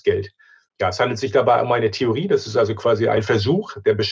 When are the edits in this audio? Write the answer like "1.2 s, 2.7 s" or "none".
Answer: none